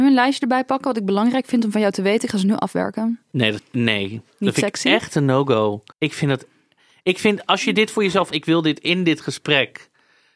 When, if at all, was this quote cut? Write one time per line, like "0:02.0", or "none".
0:03.6
0:05.9
0:08.3

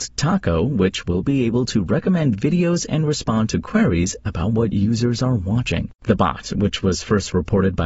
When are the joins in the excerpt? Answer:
0:06.0

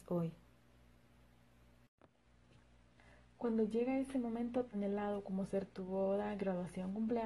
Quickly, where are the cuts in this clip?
0:04.7

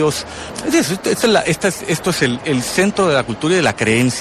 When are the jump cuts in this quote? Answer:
none

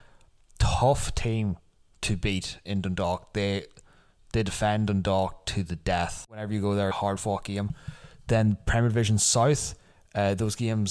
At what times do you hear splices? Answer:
0:02.6
0:06.9

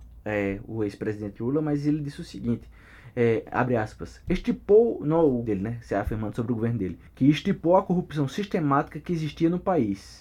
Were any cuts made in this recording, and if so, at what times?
0:05.5
0:07.1

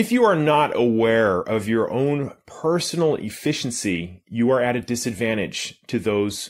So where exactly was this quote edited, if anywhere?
none

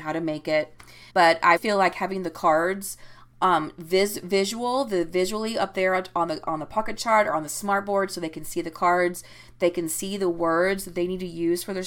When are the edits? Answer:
0:01.1
0:01.6

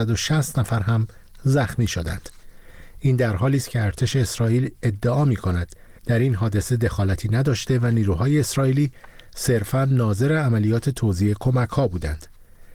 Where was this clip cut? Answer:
0:06.0

